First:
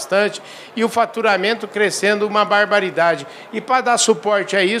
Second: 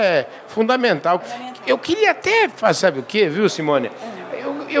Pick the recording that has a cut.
second; 2 cuts; at 1.2 s, 2.8 s

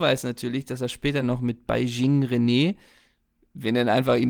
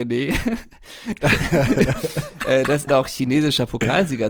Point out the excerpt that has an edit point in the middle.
second; 1 cut; at 2.9 s

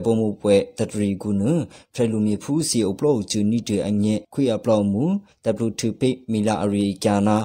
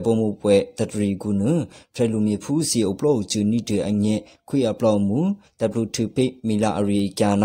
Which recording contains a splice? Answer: first; 1 cut; at 4.2 s

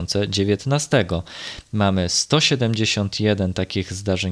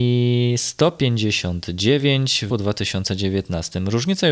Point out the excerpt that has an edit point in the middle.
second; 1 cut; at 2.5 s

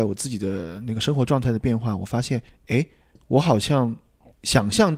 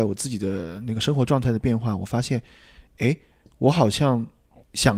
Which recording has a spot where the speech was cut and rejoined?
first; 1 cut; at 2.5 s

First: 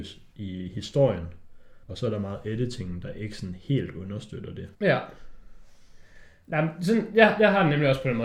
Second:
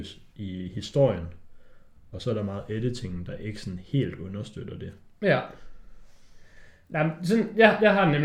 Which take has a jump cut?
first; 2 cuts; at 1.8 s, 4.7 s

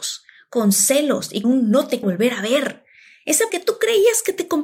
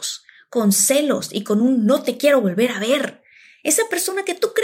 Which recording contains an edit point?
first; 3 cuts; at 1.4 s, 2.0 s, 3.5 s

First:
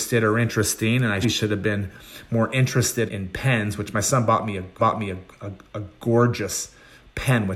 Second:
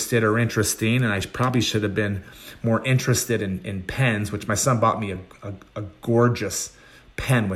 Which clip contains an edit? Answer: first; 3 cuts; at 1.2 s, 3.1 s, 4.8 s

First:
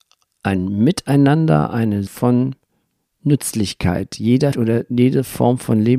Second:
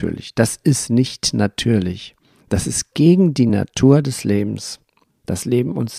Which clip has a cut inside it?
first; 2 cuts; at 2.1 s, 4.5 s

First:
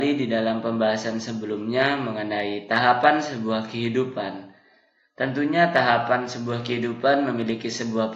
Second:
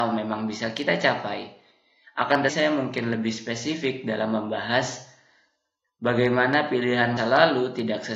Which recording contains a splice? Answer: second; 2 cuts; at 2.5 s, 7.2 s

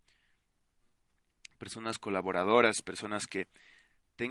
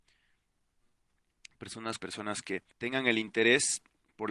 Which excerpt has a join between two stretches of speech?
second; 2 cuts; at 2.0 s, 2.7 s

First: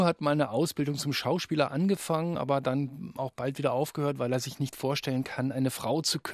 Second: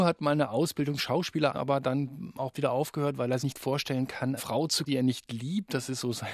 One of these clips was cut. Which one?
second; 6 cuts; at 1.0 s, 1.5 s, 2.5 s, 3.4 s, 4.4 s, 4.9 s

